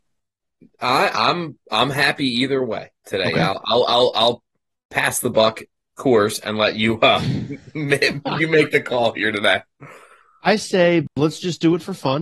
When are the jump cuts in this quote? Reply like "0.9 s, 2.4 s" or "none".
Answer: none